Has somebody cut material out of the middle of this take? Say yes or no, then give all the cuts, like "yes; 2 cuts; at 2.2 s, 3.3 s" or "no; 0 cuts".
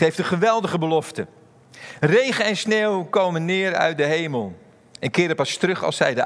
no; 0 cuts